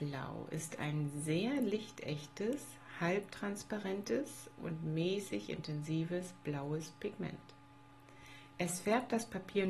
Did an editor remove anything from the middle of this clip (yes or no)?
no